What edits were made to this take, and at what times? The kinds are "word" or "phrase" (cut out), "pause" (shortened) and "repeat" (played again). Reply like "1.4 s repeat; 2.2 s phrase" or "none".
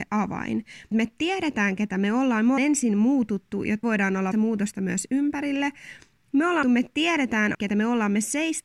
0.9 s word; 2.6 s word; 3.8 s word; 4.3 s word; 6.6 s word; 7.5 s word